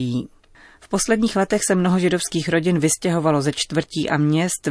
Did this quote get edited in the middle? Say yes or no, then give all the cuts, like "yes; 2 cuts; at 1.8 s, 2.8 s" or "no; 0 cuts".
no; 0 cuts